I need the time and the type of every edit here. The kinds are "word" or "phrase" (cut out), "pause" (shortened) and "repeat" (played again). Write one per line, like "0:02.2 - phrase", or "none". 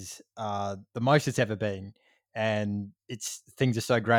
0:03.0 - pause